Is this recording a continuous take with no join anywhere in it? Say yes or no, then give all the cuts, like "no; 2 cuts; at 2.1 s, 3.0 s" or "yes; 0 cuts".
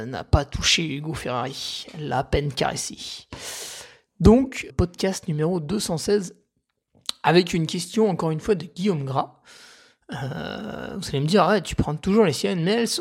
no; 1 cut; at 4.7 s